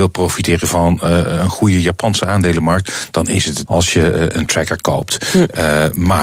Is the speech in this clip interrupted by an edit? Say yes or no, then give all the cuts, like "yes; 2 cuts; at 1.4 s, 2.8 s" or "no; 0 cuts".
yes; 1 cut; at 3.7 s